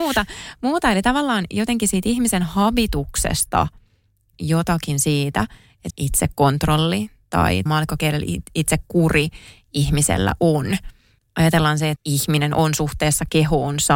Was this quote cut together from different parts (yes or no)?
yes